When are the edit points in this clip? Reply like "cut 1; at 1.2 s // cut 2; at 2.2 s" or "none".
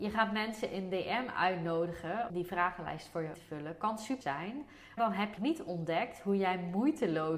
cut 1; at 2.3 s // cut 2; at 3.3 s // cut 3; at 4.2 s // cut 4; at 5.0 s // cut 5; at 5.4 s